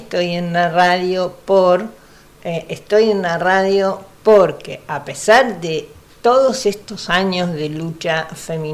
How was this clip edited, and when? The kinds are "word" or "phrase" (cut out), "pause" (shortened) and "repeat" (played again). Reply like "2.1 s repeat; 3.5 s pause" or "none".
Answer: none